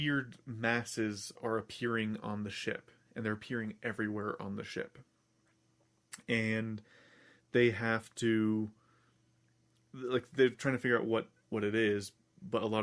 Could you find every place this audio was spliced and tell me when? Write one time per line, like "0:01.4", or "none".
none